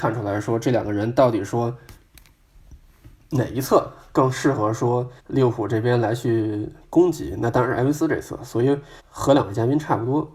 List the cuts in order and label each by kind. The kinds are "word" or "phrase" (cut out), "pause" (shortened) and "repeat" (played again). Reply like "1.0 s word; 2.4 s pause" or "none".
5.2 s pause; 9.0 s pause